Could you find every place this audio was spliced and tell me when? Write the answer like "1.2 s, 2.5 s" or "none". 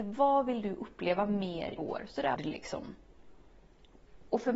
1.8 s, 2.4 s